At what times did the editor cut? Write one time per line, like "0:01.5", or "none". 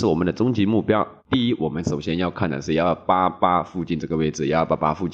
0:01.2